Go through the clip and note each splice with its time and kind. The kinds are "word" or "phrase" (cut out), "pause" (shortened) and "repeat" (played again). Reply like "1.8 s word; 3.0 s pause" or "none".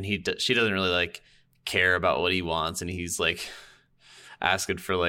none